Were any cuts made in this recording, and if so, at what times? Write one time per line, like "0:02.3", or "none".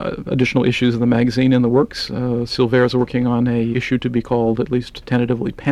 0:03.7